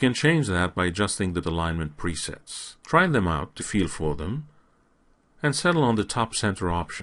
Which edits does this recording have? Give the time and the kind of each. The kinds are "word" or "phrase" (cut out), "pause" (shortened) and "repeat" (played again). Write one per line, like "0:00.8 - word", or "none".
0:01.4 - word
0:02.8 - pause
0:03.6 - word